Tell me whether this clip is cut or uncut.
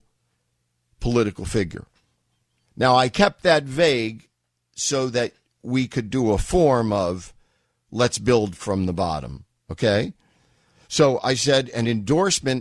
uncut